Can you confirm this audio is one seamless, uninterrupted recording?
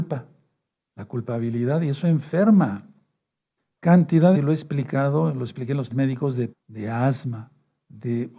no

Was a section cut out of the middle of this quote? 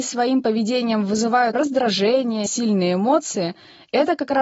yes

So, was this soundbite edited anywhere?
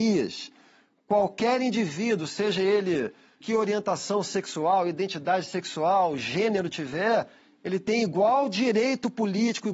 yes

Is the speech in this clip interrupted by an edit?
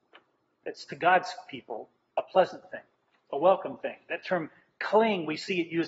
no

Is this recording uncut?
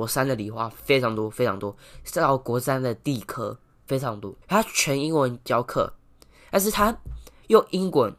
no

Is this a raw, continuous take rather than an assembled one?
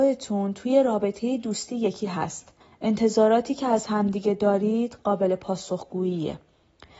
no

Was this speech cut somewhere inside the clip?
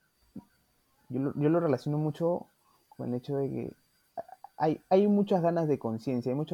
no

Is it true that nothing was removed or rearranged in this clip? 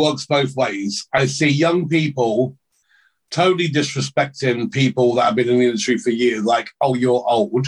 yes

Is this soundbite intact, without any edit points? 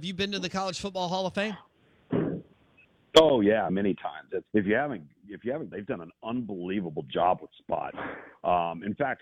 no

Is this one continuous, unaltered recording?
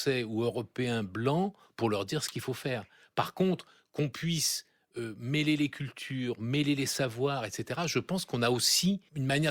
yes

